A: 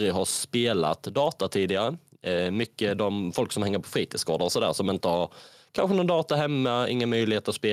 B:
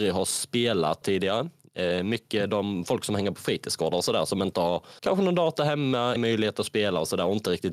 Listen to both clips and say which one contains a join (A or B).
B